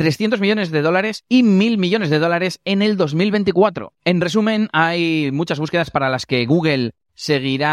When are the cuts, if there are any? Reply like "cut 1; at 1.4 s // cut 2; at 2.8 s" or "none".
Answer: none

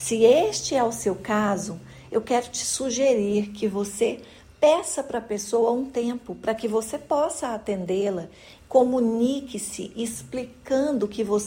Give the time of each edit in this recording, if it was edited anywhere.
none

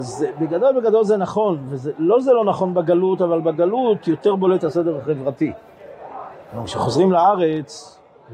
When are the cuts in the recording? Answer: none

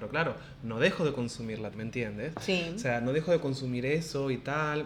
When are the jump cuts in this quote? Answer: cut 1; at 1.7 s

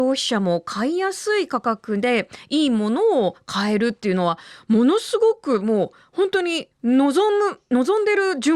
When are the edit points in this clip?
cut 1; at 6.7 s

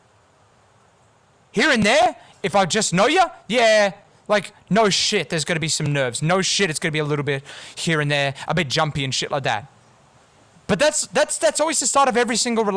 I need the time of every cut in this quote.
none

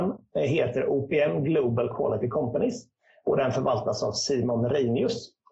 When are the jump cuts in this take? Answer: none

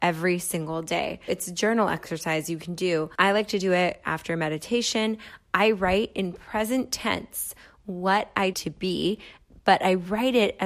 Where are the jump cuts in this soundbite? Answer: cut 1; at 1.3 s // cut 2; at 3.1 s // cut 3; at 8.5 s

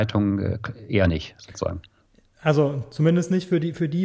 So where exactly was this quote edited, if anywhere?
none

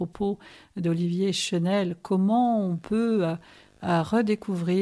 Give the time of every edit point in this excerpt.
none

